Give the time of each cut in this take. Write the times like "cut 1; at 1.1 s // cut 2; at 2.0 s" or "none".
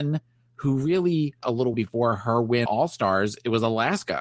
cut 1; at 1.4 s // cut 2; at 1.7 s // cut 3; at 2.7 s